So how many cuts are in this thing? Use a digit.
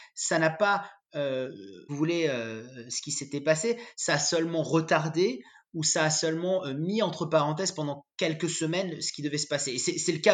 1